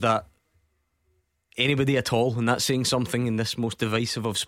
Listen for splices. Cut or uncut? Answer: uncut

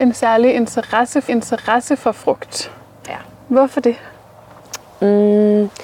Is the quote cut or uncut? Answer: cut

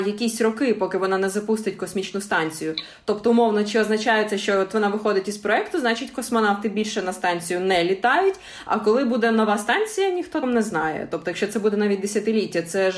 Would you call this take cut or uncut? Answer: cut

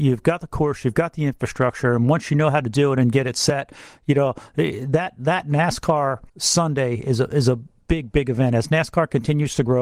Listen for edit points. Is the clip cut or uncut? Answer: cut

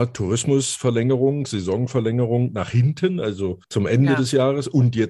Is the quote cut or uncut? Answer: cut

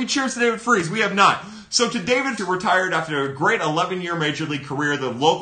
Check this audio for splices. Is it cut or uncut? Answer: cut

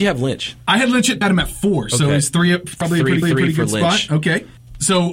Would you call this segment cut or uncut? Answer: cut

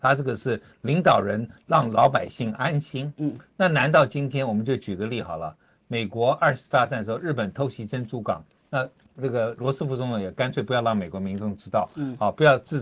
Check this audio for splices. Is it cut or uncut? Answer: uncut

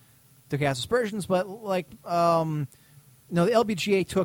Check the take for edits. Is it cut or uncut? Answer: uncut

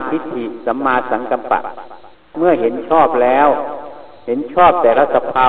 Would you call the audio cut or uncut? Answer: cut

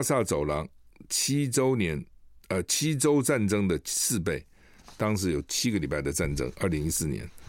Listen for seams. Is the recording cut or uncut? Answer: uncut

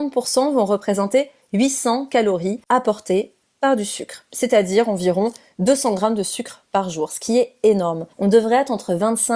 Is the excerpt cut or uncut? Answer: cut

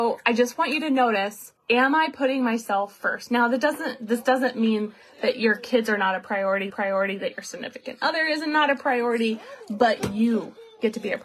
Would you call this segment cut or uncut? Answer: cut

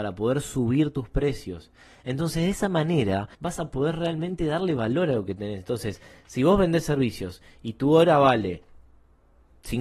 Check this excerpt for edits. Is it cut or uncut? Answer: cut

